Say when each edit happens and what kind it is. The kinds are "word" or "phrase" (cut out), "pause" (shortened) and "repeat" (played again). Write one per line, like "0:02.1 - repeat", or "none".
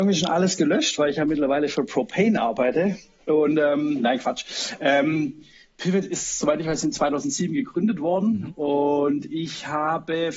none